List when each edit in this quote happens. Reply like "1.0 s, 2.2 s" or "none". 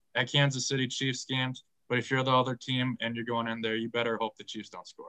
1.8 s